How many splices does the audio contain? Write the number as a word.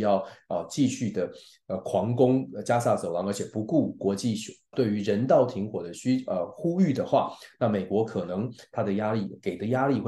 one